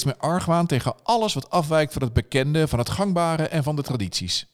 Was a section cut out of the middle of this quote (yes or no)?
no